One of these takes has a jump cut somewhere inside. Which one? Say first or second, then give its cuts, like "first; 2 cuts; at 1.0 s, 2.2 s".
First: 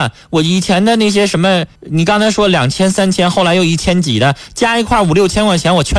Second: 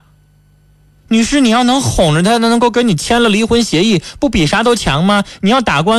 first; 1 cut; at 1.8 s